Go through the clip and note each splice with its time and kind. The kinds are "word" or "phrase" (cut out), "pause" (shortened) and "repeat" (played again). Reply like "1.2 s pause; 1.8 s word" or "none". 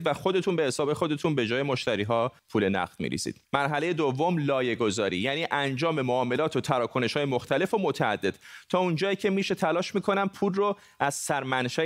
2.4 s pause; 3.4 s pause

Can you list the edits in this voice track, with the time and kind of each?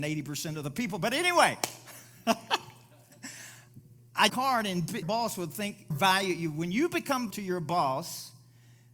4.3 s phrase; 5.0 s word; 5.9 s word; 7.3 s word

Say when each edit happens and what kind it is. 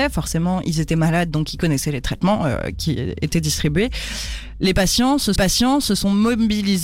5.4 s repeat

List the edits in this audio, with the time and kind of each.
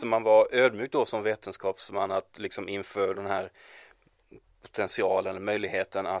3.1 s word

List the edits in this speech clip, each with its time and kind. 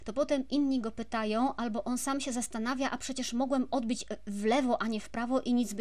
none

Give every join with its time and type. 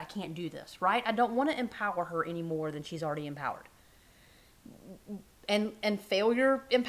none

